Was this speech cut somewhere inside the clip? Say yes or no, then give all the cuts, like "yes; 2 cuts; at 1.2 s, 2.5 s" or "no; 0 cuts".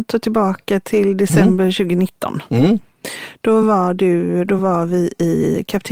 no; 0 cuts